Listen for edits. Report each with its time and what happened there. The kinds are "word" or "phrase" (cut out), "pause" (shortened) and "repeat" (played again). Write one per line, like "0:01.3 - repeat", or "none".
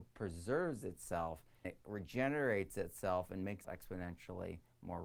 0:01.6 - word
0:03.6 - word